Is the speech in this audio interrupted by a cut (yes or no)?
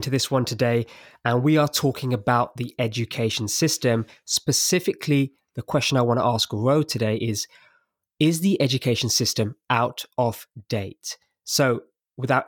no